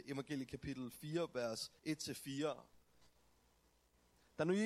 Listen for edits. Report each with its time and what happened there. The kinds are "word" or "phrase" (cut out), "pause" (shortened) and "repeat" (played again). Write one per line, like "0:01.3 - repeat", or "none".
0:01.8 - pause

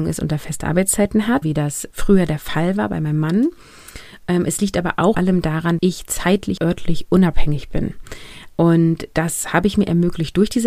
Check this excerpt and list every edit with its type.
0:01.4 - word
0:01.9 - word
0:05.1 - word
0:05.8 - word
0:06.6 - word

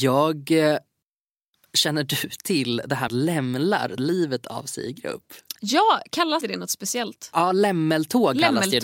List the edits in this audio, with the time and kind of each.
0:03.1 - word
0:04.0 - word
0:06.4 - word

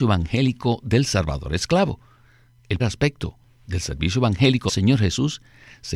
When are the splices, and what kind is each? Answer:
0:02.8 - word
0:04.7 - word

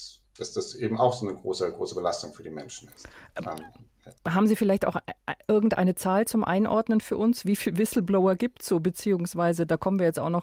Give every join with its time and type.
0:04.2 - pause

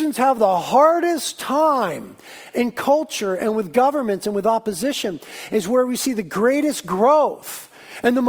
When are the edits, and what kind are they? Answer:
none

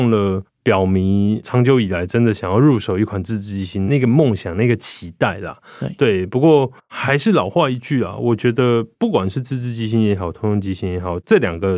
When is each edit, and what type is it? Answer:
0:06.8 - pause
0:08.9 - pause

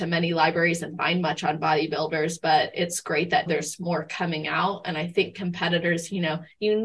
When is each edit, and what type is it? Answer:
0:03.5 - word

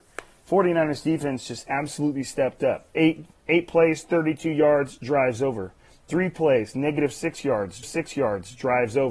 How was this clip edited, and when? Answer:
0:02.9 - pause
0:07.8 - repeat

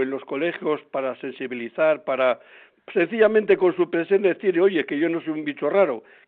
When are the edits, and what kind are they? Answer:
none

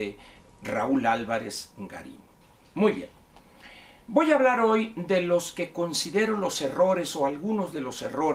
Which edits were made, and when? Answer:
none

